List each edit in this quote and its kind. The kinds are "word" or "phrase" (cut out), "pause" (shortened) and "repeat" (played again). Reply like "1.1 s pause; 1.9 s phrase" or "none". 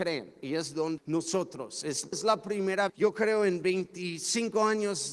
1.0 s word; 2.1 s word; 2.9 s word